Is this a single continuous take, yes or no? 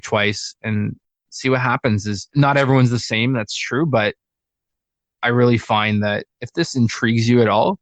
yes